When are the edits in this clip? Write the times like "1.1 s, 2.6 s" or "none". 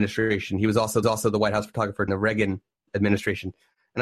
1.0 s, 2.1 s, 2.9 s

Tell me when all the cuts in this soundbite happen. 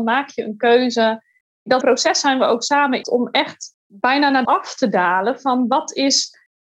1.8 s, 3.0 s, 3.8 s, 4.4 s

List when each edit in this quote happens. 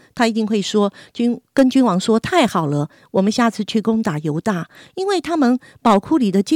none

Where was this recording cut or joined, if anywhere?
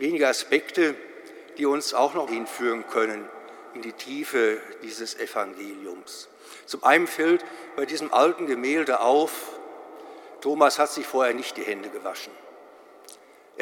2.3 s

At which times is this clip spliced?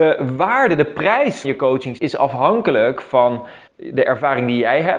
1.4 s, 2.0 s, 3.7 s

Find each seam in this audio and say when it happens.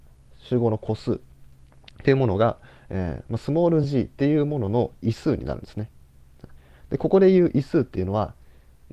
none

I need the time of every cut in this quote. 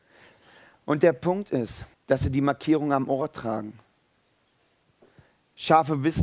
1.9 s

